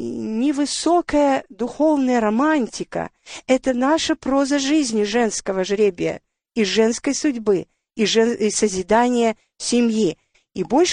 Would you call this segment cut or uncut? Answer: uncut